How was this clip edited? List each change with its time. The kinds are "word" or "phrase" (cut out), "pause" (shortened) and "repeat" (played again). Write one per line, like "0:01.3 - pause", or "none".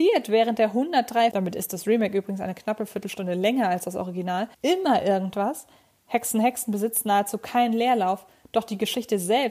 0:01.3 - word
0:04.5 - pause